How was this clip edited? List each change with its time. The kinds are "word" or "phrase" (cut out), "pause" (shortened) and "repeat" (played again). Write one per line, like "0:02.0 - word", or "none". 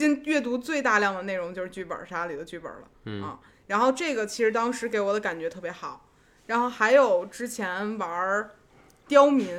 none

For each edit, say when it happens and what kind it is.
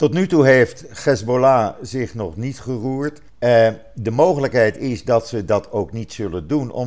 0:03.3 - pause

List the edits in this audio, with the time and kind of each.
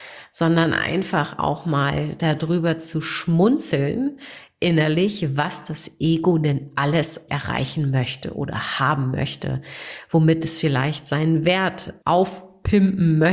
0:07.3 - word
0:12.0 - word

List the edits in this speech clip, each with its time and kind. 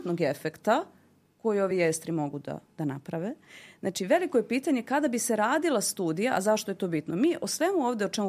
none

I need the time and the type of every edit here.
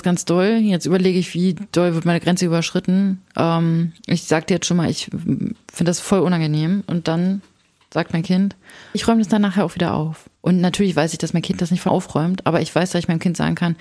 0:08.9 - word
0:10.4 - pause
0:11.9 - word

